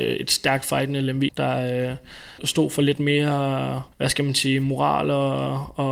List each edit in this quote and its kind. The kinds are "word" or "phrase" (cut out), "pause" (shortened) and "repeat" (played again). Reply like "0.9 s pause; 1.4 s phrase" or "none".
1.3 s word; 2.4 s phrase; 3.9 s pause